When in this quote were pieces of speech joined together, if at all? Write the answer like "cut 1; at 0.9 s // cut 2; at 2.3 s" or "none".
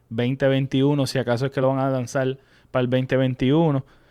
none